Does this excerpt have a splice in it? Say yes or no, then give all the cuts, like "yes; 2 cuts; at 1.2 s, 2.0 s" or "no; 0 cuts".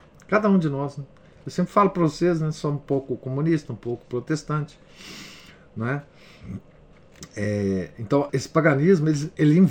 yes; 1 cut; at 8.3 s